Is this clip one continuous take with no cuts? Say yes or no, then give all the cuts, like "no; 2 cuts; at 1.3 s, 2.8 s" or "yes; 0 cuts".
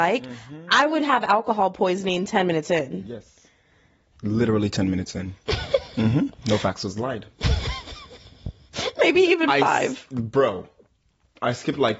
yes; 0 cuts